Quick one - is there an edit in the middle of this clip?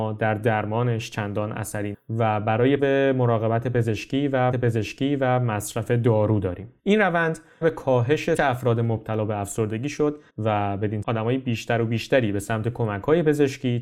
yes; 8 cuts; at 1.9 s, 2.8 s, 4.5 s, 6.8 s, 7.6 s, 8.4 s, 10.3 s, 11.0 s

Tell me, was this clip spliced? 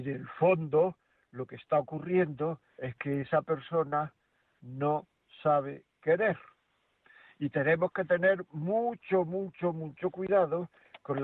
yes; 1 cut; at 2.7 s

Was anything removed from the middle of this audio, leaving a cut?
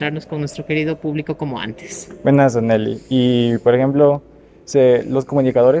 no; 0 cuts

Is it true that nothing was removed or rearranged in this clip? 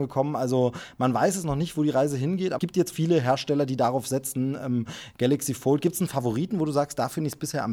no; 2 cuts; at 2.6 s, 2.9 s

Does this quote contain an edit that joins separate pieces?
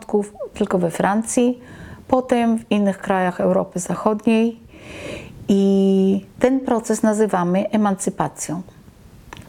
no; 0 cuts

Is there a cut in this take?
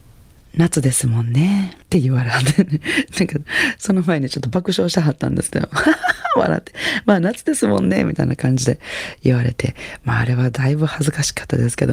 yes; 1 cut; at 1.8 s

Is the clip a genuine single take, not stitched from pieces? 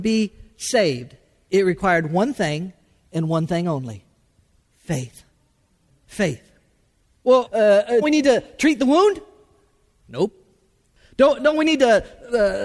no; 3 cuts; at 7.5 s, 8.0 s, 11.4 s

